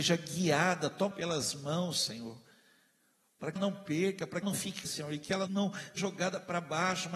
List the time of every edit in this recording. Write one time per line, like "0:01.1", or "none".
0:01.1
0:03.6
0:04.4
0:04.8
0:05.5
0:06.0